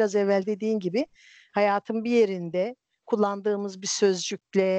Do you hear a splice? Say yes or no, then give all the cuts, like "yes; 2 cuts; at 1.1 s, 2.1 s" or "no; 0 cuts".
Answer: no; 0 cuts